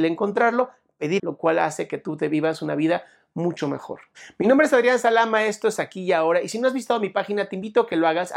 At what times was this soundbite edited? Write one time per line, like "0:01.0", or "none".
0:01.2

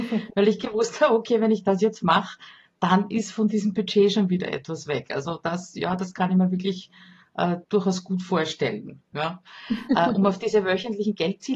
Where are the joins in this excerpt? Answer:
0:07.6

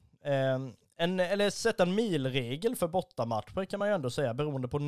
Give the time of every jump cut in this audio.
none

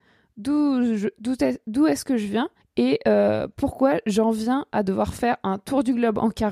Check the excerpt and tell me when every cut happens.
0:02.6

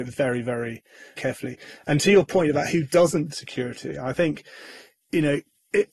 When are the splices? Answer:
0:01.2
0:03.3

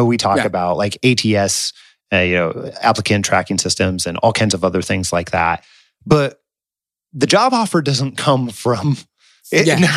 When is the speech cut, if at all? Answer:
none

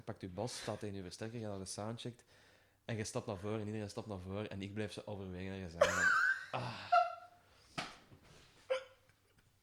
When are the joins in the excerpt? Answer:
none

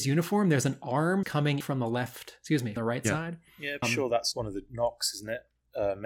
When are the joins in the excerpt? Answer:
0:01.2
0:01.6
0:02.8
0:03.8
0:04.3

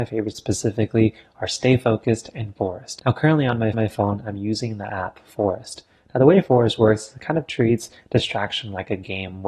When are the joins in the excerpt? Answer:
0:03.7

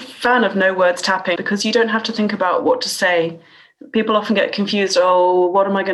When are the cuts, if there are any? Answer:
0:01.4

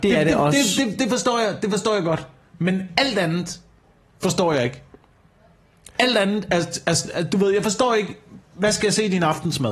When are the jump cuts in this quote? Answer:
none

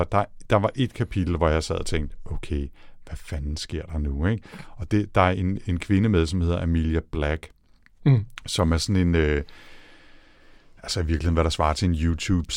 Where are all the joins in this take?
none

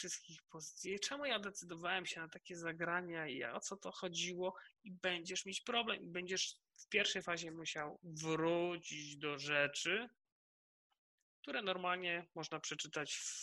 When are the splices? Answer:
none

